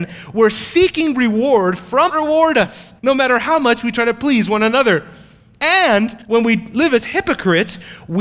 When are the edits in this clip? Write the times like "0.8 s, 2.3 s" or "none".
2.1 s, 3.0 s, 6.2 s